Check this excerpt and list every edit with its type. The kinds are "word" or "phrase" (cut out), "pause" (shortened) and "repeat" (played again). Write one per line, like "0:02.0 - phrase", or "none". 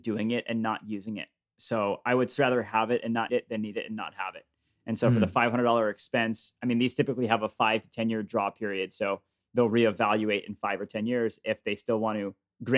0:02.4 - word
0:03.3 - word